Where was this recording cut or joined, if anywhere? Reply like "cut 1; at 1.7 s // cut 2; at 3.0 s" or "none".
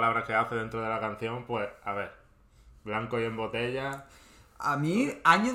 none